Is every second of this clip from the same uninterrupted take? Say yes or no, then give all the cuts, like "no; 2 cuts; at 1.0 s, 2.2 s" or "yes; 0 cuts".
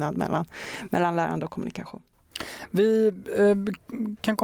yes; 0 cuts